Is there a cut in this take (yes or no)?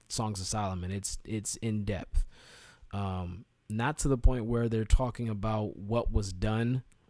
no